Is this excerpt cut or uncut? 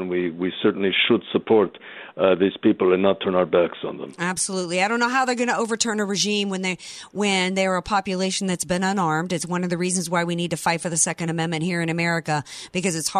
uncut